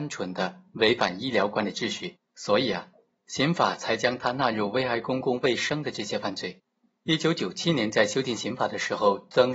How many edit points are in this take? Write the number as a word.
one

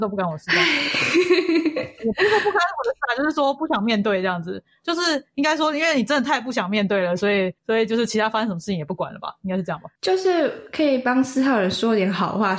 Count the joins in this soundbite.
one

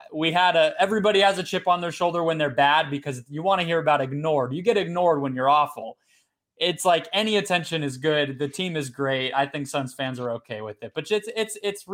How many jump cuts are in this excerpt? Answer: zero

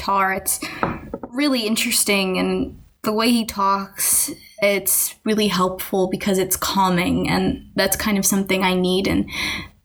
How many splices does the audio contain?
zero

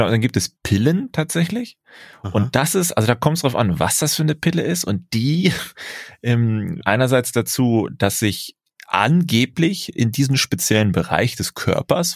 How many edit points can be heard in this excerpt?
one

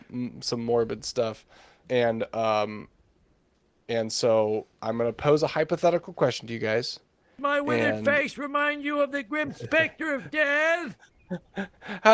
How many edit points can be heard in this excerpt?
one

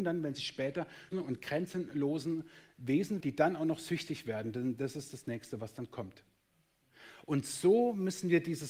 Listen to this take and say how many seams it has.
two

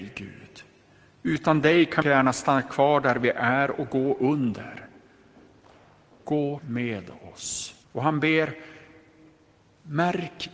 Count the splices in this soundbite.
three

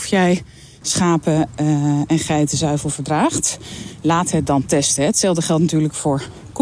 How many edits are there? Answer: zero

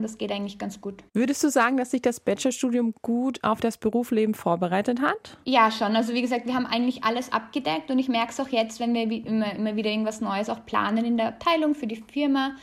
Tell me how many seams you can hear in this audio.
two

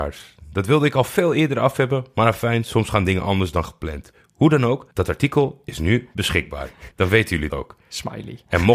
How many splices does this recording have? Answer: three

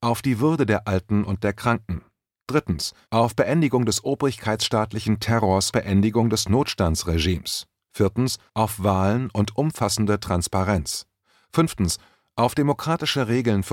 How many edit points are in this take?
three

